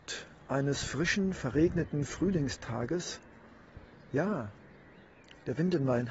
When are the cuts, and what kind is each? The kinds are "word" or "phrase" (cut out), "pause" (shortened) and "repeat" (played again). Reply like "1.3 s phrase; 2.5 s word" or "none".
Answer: 3.9 s pause